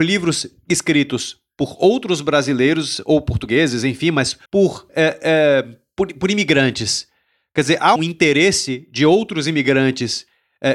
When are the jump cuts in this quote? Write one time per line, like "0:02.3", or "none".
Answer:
0:04.5
0:08.0